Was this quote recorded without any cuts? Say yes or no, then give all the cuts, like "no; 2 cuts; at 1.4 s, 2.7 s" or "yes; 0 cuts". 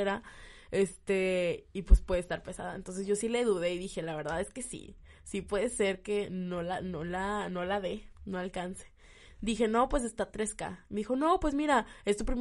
yes; 0 cuts